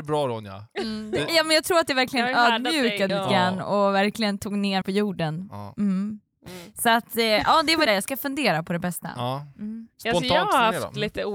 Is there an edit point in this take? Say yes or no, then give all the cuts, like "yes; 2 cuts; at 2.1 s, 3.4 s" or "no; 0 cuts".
yes; 3 cuts; at 3.1 s, 4.8 s, 7.9 s